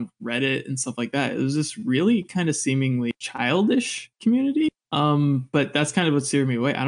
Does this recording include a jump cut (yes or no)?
yes